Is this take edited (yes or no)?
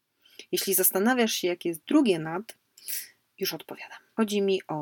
no